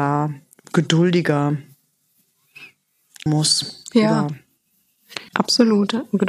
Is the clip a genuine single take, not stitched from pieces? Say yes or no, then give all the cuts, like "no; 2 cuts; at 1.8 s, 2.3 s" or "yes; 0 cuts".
no; 2 cuts; at 3.3 s, 5.3 s